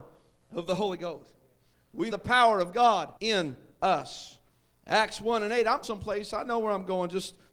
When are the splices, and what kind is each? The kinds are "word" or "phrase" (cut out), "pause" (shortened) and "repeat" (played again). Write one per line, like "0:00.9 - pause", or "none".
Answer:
0:02.1 - phrase
0:03.2 - pause
0:05.8 - word